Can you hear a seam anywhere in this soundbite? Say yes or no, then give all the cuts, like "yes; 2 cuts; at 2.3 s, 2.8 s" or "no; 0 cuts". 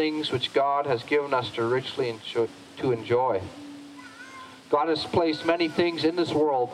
no; 0 cuts